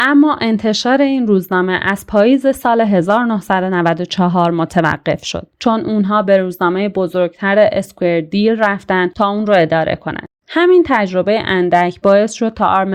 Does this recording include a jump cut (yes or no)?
yes